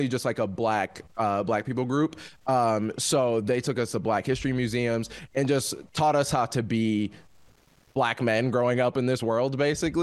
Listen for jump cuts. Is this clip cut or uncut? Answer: uncut